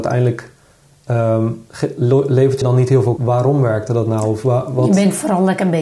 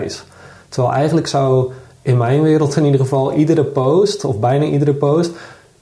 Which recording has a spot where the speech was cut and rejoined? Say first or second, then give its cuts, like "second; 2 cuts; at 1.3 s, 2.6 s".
first; 2 cuts; at 2.6 s, 3.2 s